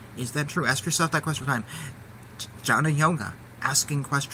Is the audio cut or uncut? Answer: cut